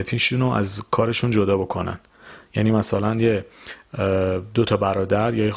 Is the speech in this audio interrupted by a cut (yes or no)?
no